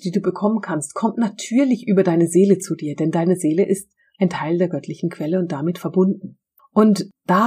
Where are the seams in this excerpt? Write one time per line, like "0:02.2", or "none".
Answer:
none